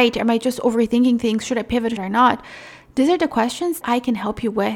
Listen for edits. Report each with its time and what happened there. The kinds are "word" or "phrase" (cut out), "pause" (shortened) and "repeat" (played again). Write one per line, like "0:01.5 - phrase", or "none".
0:02.0 - word
0:03.8 - word